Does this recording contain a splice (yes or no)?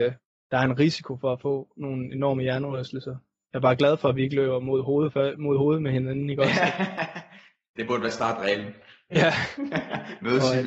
no